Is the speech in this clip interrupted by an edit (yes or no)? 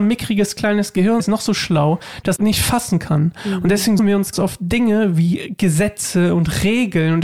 yes